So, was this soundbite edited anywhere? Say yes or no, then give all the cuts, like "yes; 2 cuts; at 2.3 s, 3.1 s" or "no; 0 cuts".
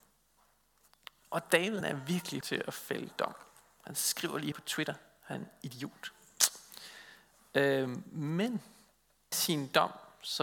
yes; 5 cuts; at 1.8 s, 2.4 s, 4.5 s, 5.3 s, 9.3 s